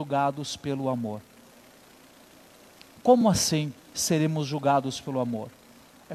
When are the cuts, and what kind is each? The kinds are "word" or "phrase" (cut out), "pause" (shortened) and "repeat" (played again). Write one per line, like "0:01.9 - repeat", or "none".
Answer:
none